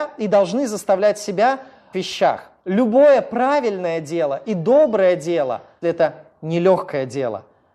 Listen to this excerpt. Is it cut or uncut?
cut